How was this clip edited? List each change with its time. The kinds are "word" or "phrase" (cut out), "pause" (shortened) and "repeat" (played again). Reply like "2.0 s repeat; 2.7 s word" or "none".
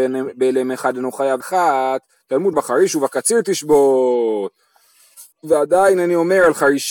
1.4 s word; 2.5 s word; 5.3 s pause